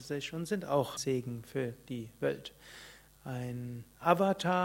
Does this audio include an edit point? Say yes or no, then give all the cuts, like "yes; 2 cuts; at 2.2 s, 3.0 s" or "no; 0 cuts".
yes; 1 cut; at 1.0 s